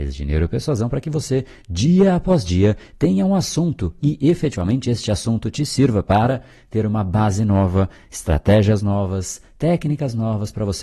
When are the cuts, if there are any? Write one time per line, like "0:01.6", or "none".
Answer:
none

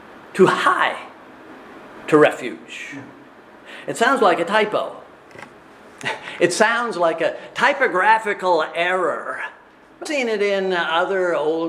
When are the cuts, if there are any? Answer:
0:10.1

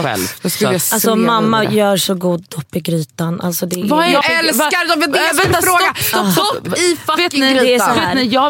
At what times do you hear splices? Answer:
0:04.2

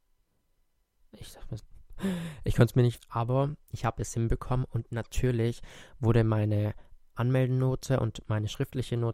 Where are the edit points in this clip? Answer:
0:01.6
0:03.0

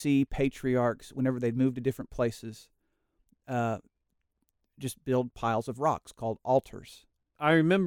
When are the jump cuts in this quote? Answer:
none

